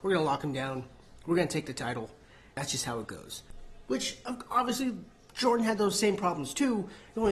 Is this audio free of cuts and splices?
yes; 0 cuts

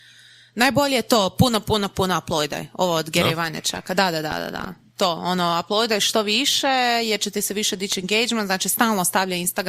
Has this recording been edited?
no; 0 cuts

